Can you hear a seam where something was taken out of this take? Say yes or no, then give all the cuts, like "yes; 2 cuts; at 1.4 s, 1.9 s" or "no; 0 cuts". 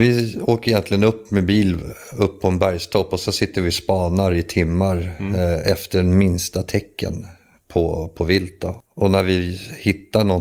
no; 0 cuts